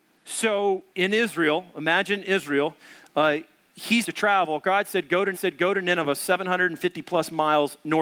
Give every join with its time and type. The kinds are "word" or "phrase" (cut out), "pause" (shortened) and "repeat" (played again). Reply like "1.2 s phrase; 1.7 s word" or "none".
0.9 s pause; 4.0 s word; 5.3 s repeat